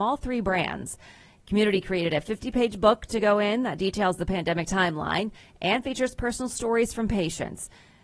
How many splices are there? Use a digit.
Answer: 0